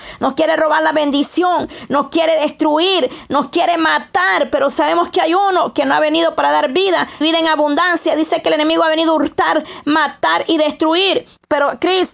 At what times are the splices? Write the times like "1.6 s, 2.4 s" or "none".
7.2 s